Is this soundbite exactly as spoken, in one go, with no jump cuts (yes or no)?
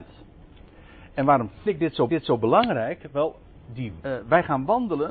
no